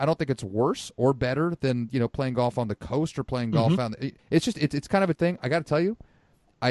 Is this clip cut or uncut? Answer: cut